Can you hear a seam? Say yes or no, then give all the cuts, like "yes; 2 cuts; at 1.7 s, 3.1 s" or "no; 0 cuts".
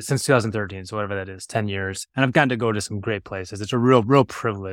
yes; 1 cut; at 2.1 s